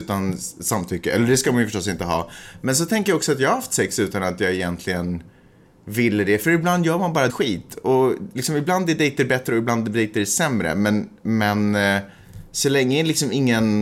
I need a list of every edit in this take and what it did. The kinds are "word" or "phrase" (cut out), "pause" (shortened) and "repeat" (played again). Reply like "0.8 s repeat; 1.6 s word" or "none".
7.3 s word